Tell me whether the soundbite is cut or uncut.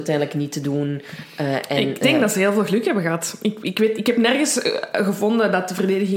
uncut